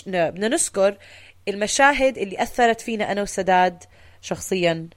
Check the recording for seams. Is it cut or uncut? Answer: uncut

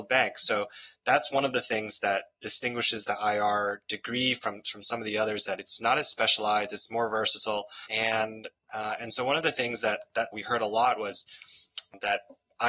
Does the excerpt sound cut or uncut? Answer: cut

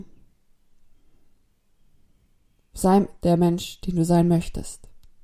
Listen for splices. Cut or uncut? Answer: uncut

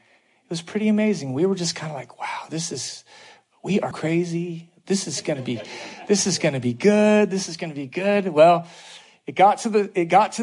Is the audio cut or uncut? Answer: cut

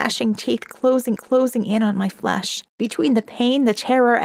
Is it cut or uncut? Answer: cut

